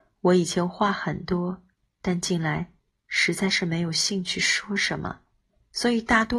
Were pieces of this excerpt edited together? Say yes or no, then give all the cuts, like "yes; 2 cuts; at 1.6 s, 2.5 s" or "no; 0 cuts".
no; 0 cuts